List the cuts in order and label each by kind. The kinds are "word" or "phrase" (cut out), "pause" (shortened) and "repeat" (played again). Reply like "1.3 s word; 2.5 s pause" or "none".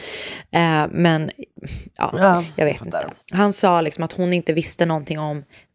3.2 s pause